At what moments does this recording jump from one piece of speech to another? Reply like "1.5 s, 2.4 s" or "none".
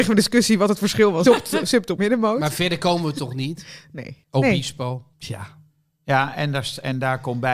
1.3 s, 2.0 s, 4.2 s, 5.1 s